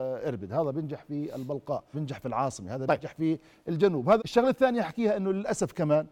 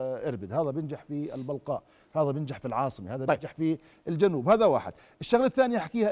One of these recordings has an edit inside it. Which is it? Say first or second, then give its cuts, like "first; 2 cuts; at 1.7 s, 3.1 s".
first; 2 cuts; at 1.9 s, 4.2 s